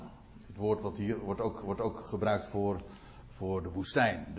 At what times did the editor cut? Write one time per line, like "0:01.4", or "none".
0:01.6